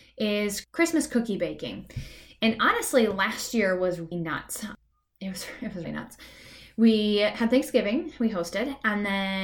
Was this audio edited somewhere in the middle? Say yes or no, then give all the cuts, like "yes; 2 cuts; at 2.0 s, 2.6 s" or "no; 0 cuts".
yes; 2 cuts; at 4.1 s, 5.8 s